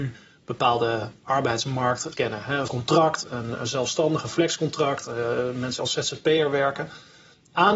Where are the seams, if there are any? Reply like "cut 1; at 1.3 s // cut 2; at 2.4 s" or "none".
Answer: cut 1; at 2.1 s // cut 2; at 2.7 s // cut 3; at 5.8 s